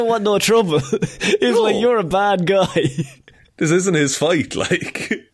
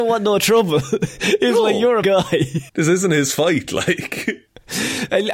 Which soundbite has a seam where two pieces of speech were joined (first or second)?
second